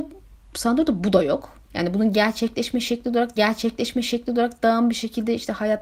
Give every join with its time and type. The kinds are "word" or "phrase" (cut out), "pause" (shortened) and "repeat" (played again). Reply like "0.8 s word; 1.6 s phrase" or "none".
1.6 s pause; 3.4 s repeat